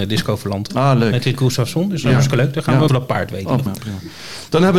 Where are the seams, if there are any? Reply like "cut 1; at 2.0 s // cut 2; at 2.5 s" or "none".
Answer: cut 1; at 1.3 s // cut 2; at 2.9 s // cut 3; at 3.7 s